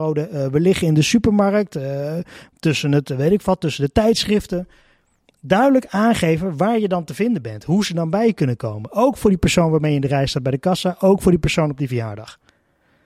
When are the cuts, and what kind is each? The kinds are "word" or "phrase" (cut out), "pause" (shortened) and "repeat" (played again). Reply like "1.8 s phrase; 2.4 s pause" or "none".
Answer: none